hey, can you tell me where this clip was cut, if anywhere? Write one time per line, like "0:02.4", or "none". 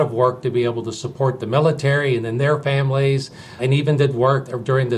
none